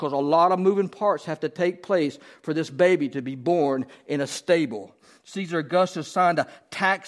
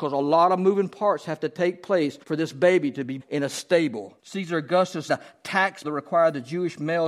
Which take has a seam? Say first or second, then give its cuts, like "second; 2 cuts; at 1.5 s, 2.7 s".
second; 5 cuts; at 2.2 s, 3.2 s, 4.2 s, 5.1 s, 5.8 s